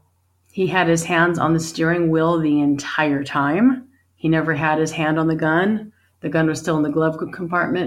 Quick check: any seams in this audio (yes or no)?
no